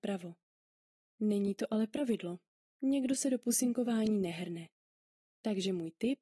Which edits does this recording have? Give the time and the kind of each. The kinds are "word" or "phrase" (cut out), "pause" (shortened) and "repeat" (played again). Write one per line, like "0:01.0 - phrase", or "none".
none